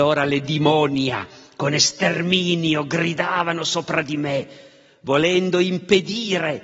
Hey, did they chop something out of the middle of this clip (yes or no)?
no